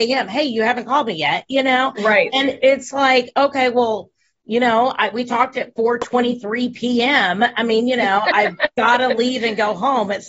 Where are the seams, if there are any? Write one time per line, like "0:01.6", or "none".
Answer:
none